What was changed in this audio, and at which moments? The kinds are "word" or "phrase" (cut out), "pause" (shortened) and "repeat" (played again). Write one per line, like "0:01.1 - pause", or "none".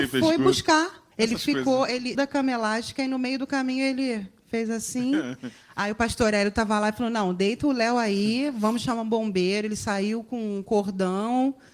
0:01.1 - pause
0:02.1 - word